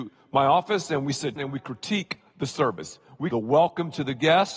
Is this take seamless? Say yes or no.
no